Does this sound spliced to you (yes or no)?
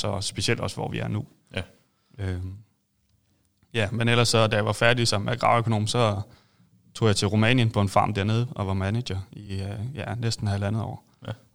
no